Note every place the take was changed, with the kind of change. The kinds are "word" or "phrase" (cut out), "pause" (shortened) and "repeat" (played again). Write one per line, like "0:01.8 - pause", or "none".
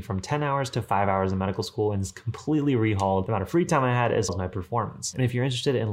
0:04.3 - word